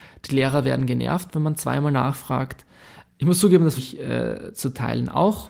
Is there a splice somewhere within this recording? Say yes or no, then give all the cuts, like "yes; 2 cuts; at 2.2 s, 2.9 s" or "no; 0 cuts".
yes; 1 cut; at 3.8 s